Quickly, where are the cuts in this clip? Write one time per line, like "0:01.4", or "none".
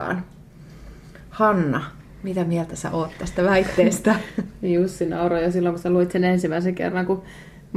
none